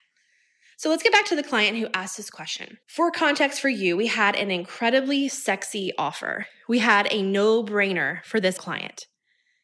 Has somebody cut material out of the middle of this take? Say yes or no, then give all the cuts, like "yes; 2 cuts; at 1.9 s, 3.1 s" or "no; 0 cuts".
yes; 2 cuts; at 2.8 s, 8.6 s